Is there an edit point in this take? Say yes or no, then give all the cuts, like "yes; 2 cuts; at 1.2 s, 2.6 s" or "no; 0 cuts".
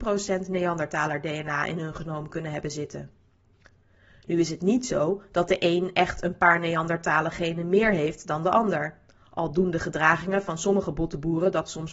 no; 0 cuts